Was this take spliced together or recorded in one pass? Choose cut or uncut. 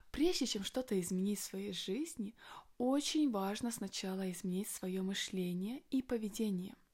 uncut